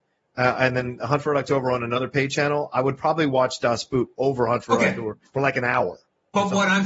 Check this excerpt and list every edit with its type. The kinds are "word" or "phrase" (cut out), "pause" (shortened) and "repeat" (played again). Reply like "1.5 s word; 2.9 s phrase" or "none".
none